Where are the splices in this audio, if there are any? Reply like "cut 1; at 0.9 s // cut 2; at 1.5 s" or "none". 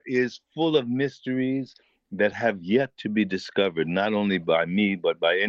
none

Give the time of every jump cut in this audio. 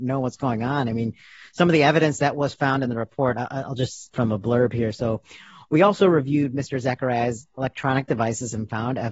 cut 1; at 4.1 s

